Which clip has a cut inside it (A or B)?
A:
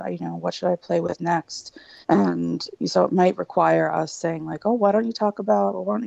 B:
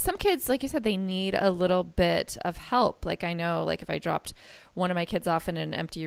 A